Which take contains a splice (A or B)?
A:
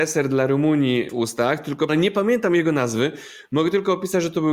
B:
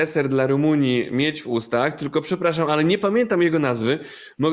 A